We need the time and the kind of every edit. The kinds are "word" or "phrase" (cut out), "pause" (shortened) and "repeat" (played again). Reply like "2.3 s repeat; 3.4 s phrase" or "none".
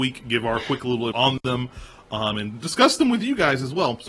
1.1 s word